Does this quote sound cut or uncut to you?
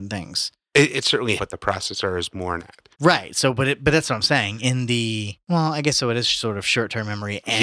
cut